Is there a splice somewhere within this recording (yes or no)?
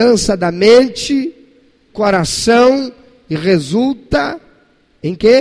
yes